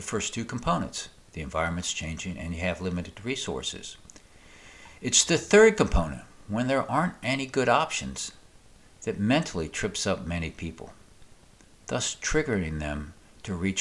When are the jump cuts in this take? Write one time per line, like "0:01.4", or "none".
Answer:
none